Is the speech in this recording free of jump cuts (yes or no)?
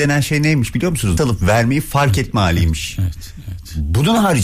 no